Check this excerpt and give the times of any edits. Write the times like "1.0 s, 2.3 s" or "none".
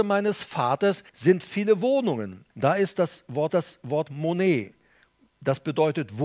1.1 s, 2.5 s, 3.5 s